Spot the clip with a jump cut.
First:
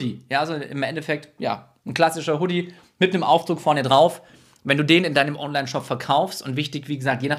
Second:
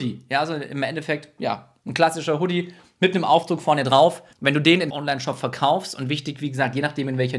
second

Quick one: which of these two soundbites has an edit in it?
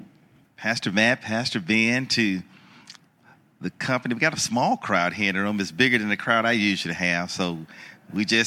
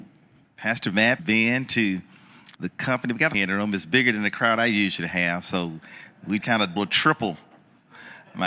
second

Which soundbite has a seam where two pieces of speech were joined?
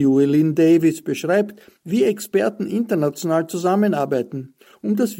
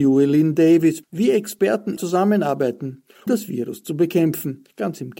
second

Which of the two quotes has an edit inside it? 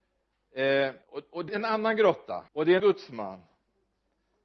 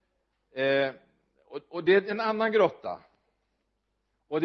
first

